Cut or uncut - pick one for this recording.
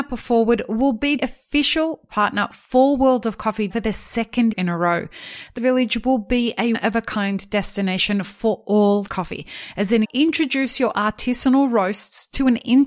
cut